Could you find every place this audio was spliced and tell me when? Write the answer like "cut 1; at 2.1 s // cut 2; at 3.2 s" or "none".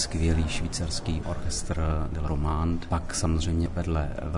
cut 1; at 1.2 s // cut 2; at 2.3 s